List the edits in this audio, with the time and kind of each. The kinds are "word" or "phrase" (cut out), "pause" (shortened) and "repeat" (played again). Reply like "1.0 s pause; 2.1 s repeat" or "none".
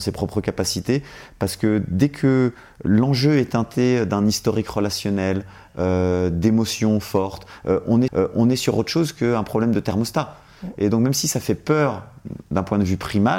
8.1 s repeat